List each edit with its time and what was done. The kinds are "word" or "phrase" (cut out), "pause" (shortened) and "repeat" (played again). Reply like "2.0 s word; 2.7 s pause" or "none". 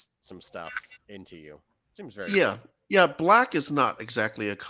1.0 s pause